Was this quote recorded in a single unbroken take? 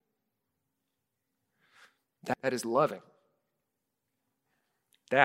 no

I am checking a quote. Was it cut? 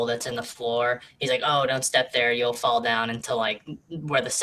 no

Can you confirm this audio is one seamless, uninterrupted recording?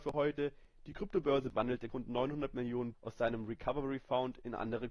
no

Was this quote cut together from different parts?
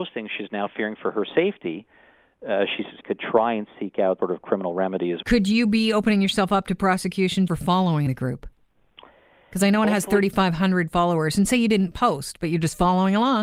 yes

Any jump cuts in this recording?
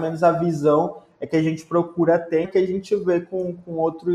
yes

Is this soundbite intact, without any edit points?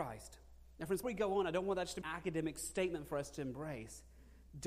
no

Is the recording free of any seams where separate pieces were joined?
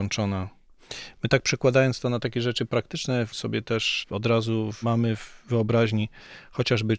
yes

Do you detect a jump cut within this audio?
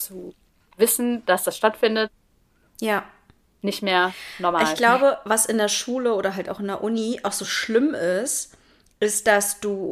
no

